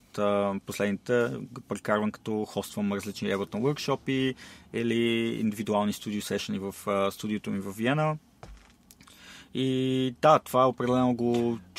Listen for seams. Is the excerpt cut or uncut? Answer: uncut